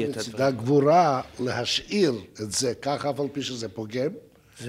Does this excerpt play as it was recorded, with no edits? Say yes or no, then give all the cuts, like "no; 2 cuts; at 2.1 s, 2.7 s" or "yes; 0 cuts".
yes; 0 cuts